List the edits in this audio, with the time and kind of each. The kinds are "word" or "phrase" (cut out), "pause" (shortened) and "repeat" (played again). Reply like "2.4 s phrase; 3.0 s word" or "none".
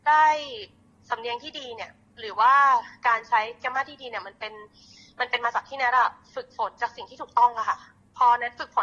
none